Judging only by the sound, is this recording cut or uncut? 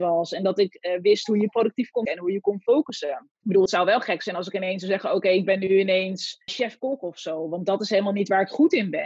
cut